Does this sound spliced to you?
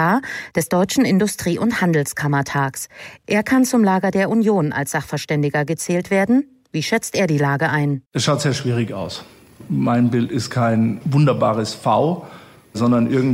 yes; 1 cut; at 8.1 s

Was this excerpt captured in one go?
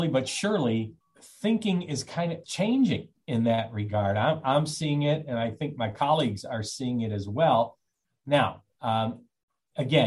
no; 3 cuts; at 1.0 s, 2.4 s, 8.7 s

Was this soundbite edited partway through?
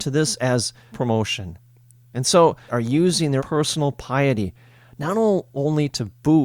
yes; 3 cuts; at 0.9 s, 2.7 s, 3.4 s

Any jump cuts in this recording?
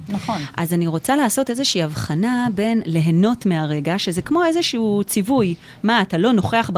no; 0 cuts

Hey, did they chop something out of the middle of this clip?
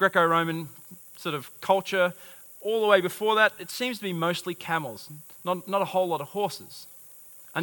no; 0 cuts

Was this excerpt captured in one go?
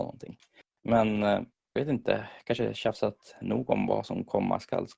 no; 1 cut; at 1.8 s

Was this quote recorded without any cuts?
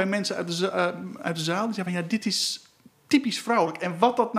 yes; 0 cuts

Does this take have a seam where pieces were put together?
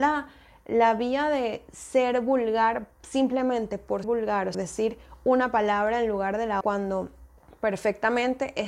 yes; 5 cuts; at 2.9 s, 4.0 s, 4.5 s, 6.6 s, 7.4 s

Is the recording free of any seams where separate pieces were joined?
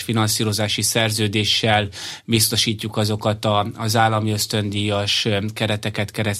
yes; 0 cuts

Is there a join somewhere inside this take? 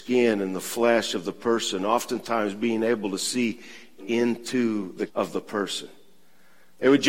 yes; 2 cuts; at 4.0 s, 5.1 s

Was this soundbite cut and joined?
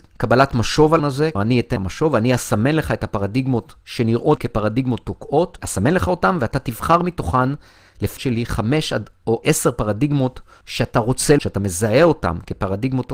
yes; 9 cuts; at 1.0 s, 1.4 s, 1.8 s, 4.4 s, 5.6 s, 8.2 s, 9.4 s, 10.6 s, 11.4 s

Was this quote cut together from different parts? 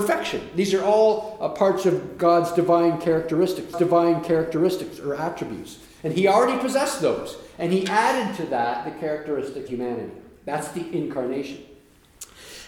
yes; 2 cuts; at 3.7 s, 9.7 s

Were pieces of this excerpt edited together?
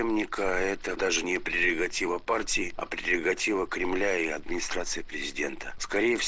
no; 0 cuts

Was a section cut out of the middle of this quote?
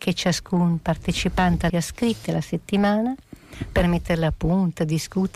yes; 2 cuts; at 1.7 s, 2.2 s

